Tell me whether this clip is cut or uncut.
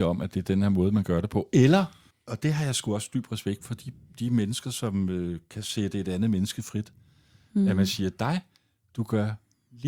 uncut